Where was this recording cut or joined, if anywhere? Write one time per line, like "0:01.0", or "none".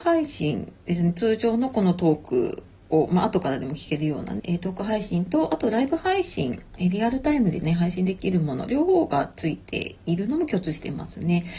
0:04.4

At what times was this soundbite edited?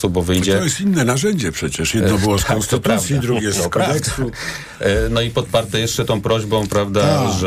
none

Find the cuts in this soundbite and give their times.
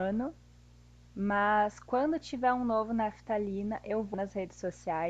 0:04.1

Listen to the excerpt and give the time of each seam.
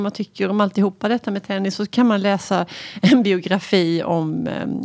none

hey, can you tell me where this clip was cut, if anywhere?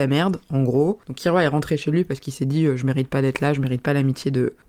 none

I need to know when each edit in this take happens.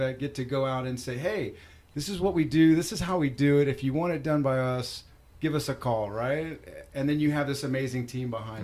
none

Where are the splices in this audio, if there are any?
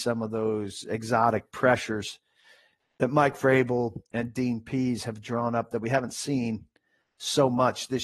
none

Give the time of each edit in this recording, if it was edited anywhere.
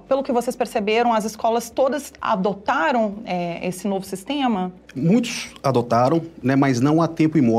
none

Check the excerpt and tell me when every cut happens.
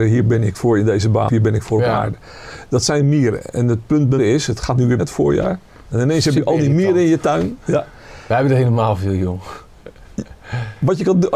0:01.3
0:04.2
0:05.0

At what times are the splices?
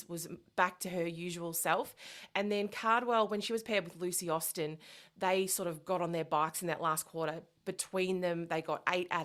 none

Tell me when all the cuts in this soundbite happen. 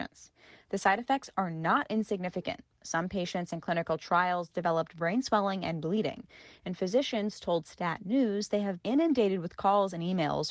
0:08.8

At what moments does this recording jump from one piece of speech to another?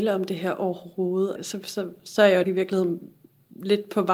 0:01.4
0:02.4

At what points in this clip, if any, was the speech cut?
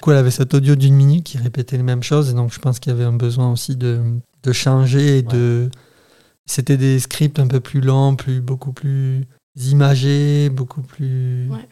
none

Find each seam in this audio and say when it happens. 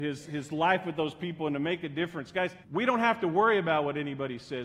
0:02.6

